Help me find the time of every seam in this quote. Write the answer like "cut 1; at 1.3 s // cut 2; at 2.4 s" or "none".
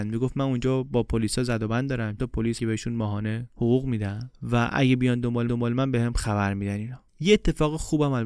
cut 1; at 2.2 s // cut 2; at 2.6 s // cut 3; at 5.5 s // cut 4; at 7.1 s